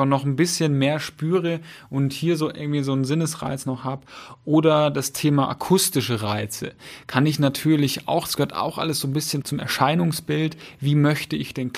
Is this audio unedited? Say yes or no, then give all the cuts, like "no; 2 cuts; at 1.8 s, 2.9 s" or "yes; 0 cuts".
no; 1 cut; at 9.4 s